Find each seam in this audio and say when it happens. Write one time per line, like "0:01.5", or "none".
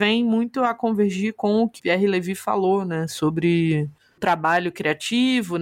0:01.8
0:04.2